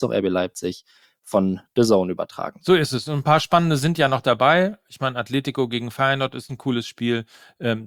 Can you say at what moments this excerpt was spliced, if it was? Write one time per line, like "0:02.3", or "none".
none

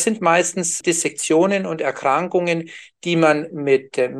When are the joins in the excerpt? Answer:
none

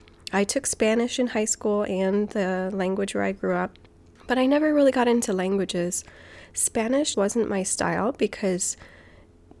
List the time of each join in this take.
0:03.9
0:07.1

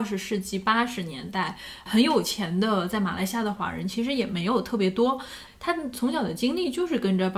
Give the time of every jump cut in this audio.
0:01.9

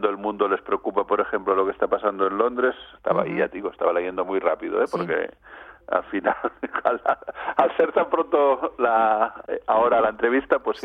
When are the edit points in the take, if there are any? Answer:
none

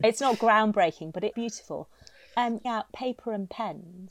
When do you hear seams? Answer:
0:01.3
0:02.6

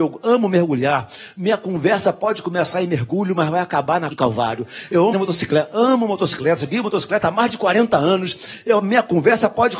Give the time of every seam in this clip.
0:04.1
0:05.1

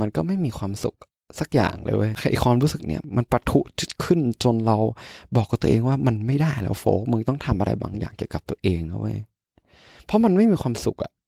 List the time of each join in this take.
none

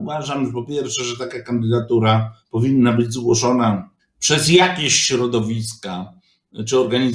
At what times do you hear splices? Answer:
0:02.4
0:04.0

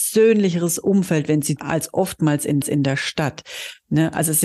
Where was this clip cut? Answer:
0:01.6
0:02.6

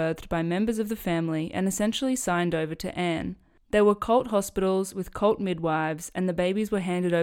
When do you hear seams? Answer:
none

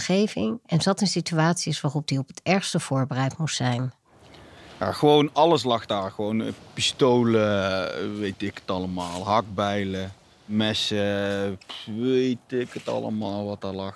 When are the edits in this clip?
none

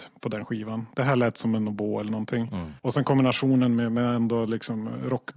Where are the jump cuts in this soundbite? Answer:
0:02.8

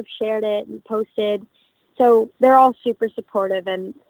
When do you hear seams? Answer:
0:02.3

